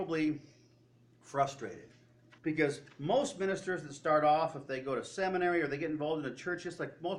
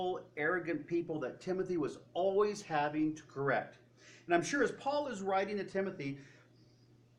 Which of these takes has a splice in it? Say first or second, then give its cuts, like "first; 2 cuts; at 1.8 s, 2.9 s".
first; 1 cut; at 2.4 s